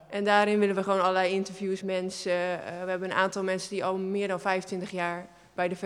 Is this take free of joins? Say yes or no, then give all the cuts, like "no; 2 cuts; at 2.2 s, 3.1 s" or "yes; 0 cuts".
no; 1 cut; at 1.8 s